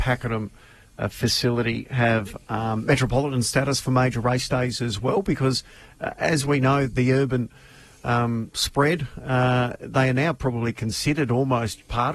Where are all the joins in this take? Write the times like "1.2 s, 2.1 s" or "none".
none